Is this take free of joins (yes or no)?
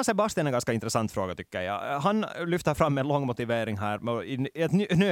yes